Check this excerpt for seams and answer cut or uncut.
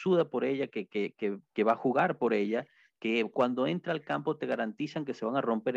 uncut